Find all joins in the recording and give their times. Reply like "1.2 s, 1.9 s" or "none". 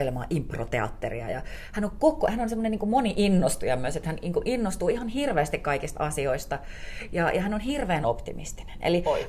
8.0 s

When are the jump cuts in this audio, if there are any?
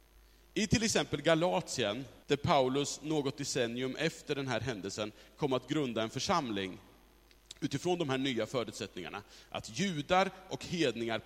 2.2 s

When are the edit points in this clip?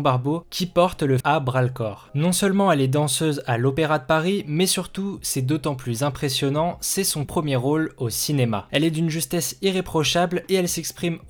1.2 s, 7.2 s

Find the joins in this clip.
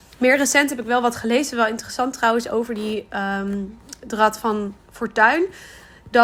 4.8 s

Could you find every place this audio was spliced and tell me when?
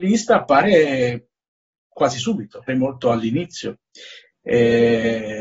2.7 s

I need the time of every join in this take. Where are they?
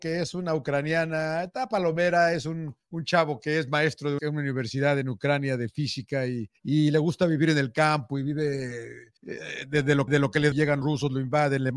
2.8 s, 4.2 s, 6.6 s, 9.2 s, 10.1 s, 10.5 s, 10.8 s

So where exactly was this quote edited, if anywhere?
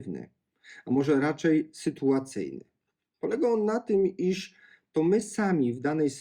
none

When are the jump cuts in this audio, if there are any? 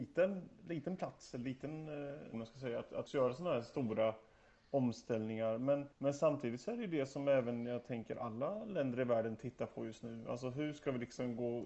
2.3 s, 3.1 s, 5.9 s

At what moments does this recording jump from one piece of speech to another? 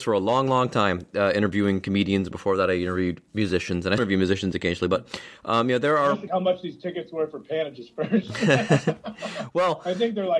4.0 s, 6.3 s

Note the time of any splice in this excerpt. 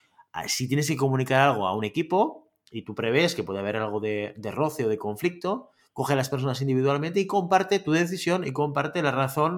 none

